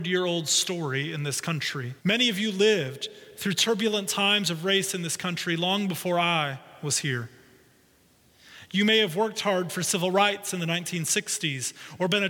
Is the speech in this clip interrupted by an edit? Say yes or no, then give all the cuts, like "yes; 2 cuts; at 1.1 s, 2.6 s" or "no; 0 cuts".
yes; 1 cut; at 2.0 s